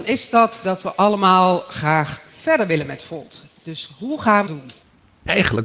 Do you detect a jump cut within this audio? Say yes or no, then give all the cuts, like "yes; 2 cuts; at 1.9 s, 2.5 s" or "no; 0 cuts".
yes; 1 cut; at 4.5 s